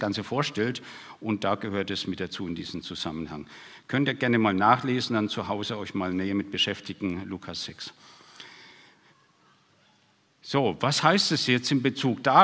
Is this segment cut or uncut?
uncut